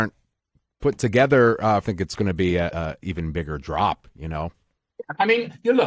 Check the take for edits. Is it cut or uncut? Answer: cut